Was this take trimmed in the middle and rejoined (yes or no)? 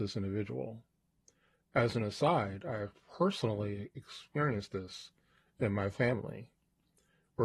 no